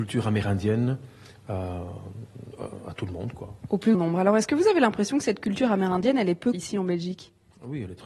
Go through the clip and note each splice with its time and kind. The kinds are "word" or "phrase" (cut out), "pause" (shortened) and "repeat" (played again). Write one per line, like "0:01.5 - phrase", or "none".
0:03.9 - word
0:06.5 - word